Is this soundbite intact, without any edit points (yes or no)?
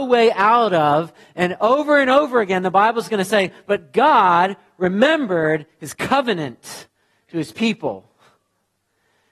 yes